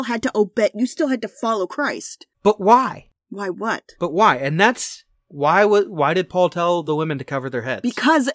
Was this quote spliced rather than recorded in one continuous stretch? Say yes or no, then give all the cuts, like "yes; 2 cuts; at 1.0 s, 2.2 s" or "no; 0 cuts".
no; 0 cuts